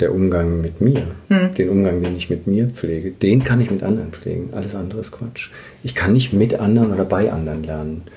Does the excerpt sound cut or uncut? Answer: cut